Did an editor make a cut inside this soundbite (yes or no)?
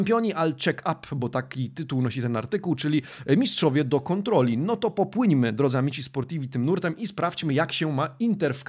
no